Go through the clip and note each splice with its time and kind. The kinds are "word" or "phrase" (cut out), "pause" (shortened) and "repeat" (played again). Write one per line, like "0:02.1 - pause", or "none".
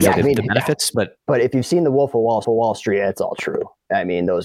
0:01.2 - pause
0:02.4 - repeat